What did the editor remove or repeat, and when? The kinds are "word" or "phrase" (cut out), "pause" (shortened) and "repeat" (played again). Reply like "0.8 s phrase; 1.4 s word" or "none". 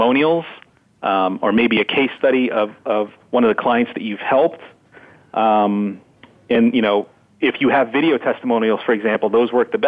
3.2 s pause